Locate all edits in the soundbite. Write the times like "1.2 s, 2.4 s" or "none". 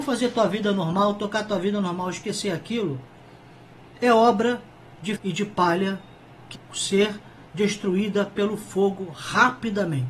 5.2 s, 6.6 s